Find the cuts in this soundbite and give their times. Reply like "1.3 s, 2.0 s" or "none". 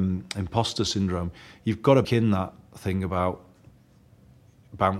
2.0 s